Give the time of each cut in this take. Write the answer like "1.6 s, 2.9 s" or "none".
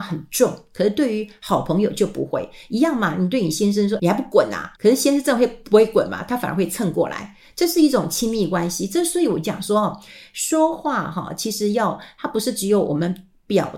4.0 s, 4.8 s